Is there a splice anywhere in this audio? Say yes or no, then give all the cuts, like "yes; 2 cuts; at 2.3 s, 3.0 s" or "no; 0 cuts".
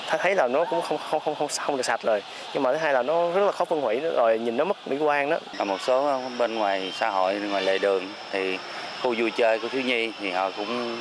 no; 0 cuts